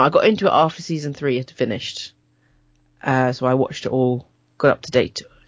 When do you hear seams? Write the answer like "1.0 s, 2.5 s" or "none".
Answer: none